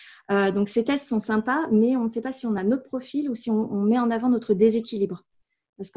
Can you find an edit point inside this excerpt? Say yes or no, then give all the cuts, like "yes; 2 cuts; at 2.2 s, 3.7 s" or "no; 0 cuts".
no; 0 cuts